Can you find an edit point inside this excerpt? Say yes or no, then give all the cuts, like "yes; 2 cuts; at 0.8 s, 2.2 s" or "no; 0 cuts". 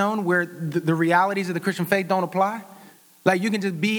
no; 0 cuts